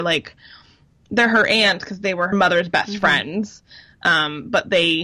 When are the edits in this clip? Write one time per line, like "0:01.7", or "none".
0:02.3